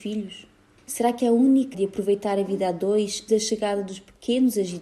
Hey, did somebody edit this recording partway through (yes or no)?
yes